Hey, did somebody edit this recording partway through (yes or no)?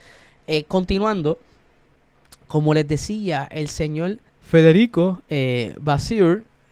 yes